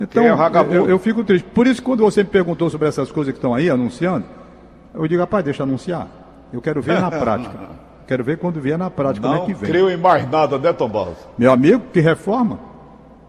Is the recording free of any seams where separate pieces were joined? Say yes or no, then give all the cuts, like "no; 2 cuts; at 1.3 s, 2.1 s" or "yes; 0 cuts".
yes; 0 cuts